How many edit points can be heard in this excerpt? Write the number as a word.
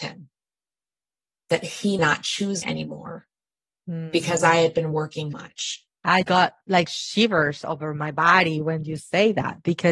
four